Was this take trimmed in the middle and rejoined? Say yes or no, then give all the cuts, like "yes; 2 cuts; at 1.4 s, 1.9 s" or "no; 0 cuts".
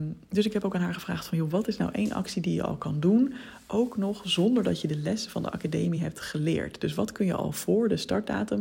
no; 0 cuts